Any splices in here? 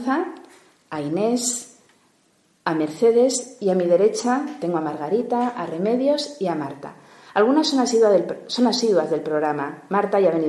no; 0 cuts

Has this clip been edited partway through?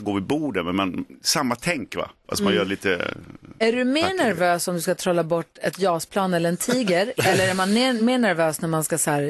no; 0 cuts

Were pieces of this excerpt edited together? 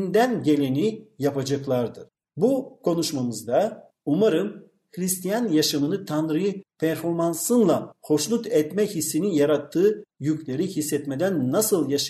no; 0 cuts

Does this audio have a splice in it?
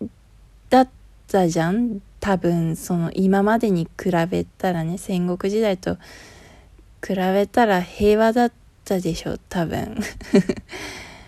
no; 0 cuts

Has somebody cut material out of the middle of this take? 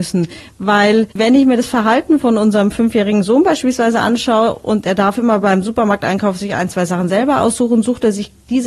yes; 1 cut; at 1.1 s

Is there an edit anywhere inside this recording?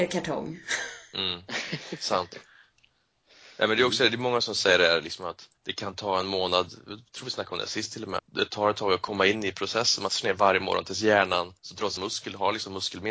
yes; 5 cuts; at 5.6 s, 8.2 s, 10.1 s, 11.6 s, 12.0 s

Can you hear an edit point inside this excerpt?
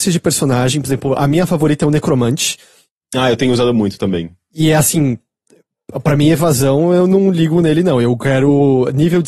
no; 0 cuts

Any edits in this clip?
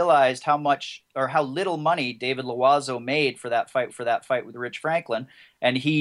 yes; 1 cut; at 3.9 s

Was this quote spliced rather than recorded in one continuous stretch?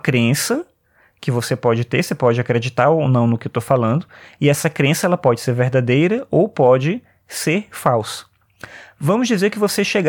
no; 0 cuts

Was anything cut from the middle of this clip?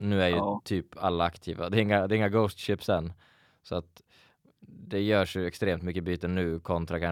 no; 0 cuts

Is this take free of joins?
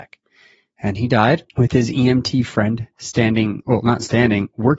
no; 1 cut; at 1.5 s

